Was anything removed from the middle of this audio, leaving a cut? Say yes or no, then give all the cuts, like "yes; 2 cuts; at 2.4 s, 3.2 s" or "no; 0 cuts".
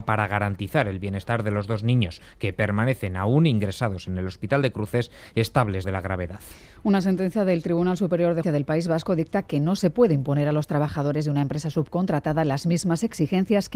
yes; 2 cuts; at 5.8 s, 8.4 s